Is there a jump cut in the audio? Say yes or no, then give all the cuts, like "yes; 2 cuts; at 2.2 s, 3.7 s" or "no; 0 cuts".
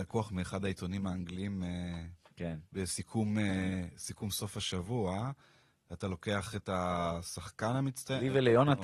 no; 0 cuts